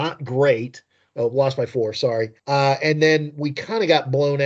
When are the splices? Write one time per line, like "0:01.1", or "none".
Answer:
0:02.4